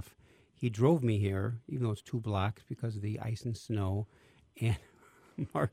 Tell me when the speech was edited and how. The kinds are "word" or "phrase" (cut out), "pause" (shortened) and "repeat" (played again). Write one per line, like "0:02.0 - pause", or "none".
none